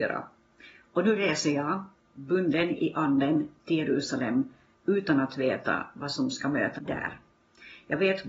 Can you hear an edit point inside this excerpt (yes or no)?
yes